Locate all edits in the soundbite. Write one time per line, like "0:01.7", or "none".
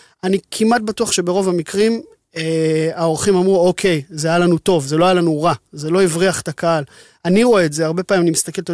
none